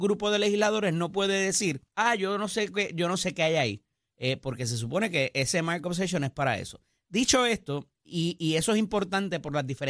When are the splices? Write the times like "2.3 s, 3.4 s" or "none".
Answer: 1.9 s